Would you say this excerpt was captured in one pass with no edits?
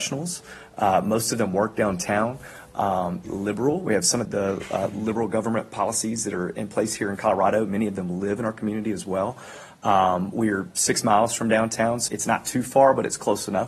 no; 3 cuts; at 3.2 s, 4.3 s, 12.1 s

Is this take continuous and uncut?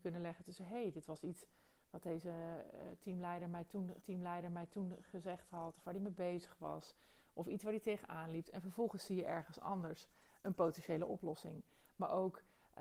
no; 1 cut; at 4.0 s

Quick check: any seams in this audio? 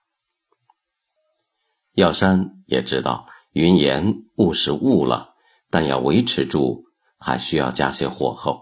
no; 0 cuts

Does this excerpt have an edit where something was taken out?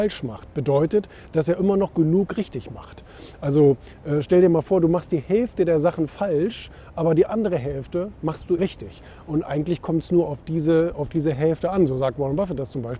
yes; 1 cut; at 8.6 s

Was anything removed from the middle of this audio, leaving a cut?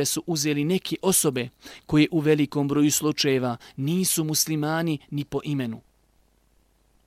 no; 0 cuts

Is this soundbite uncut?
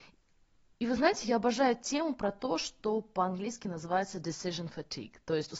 yes; 0 cuts

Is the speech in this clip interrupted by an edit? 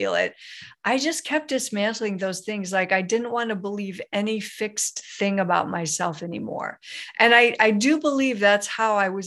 no; 0 cuts

